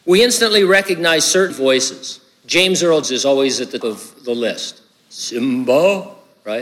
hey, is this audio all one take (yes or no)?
no